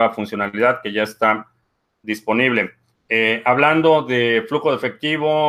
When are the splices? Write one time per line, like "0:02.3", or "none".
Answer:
none